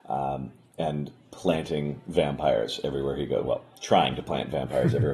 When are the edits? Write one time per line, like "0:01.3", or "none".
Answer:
none